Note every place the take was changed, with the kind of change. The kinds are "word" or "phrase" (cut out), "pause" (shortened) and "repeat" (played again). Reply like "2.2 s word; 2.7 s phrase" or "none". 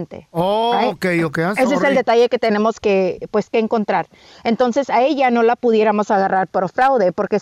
2.8 s word